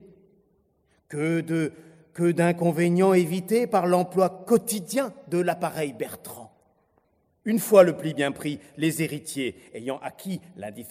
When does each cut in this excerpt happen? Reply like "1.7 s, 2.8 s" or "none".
7.0 s

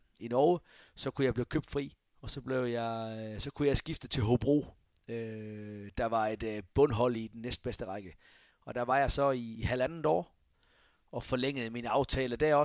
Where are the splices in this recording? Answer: none

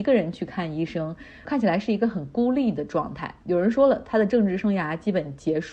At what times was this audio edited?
1.4 s

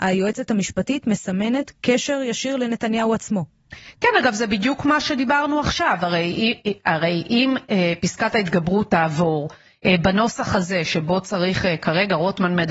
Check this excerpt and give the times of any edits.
none

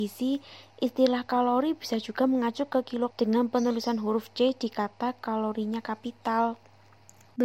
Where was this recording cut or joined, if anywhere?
3.1 s

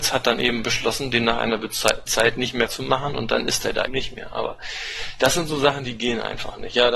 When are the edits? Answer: 2.1 s, 2.7 s, 3.9 s

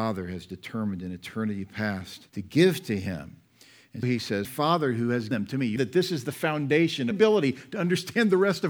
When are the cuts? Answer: 2.3 s, 4.0 s, 4.4 s, 5.3 s, 5.8 s, 7.1 s

